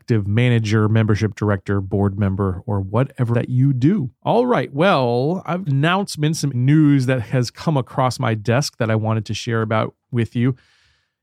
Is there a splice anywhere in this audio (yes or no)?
yes